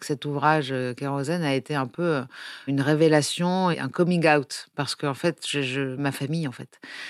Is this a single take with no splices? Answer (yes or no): no